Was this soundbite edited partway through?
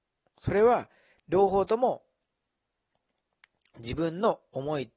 no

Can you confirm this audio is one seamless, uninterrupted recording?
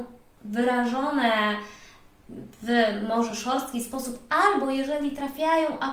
yes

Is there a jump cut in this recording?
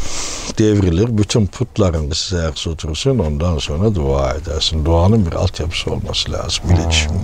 yes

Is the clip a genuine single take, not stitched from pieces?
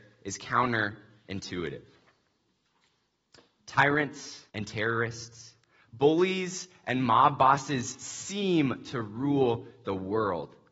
no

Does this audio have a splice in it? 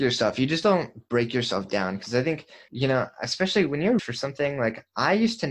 yes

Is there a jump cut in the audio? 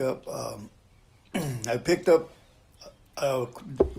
no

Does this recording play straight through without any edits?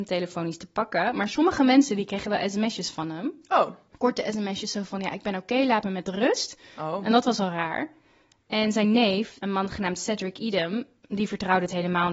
yes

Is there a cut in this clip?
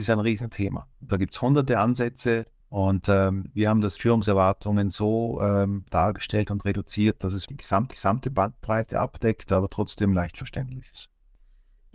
yes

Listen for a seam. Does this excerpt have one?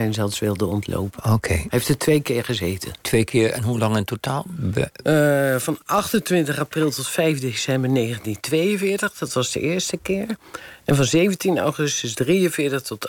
yes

